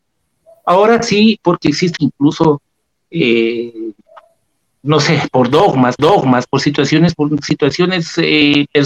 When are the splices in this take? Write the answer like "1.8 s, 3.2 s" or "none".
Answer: 2.0 s, 6.0 s, 7.1 s